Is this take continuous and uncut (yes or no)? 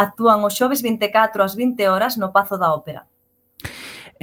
yes